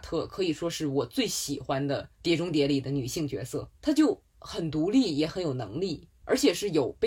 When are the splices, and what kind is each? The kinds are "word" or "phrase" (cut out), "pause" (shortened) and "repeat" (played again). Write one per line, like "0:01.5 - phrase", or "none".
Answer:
0:02.1 - pause
0:03.7 - pause
0:06.1 - pause